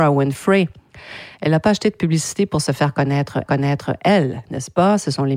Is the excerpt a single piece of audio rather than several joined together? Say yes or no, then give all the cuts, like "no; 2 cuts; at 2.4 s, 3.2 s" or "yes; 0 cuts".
no; 1 cut; at 3.5 s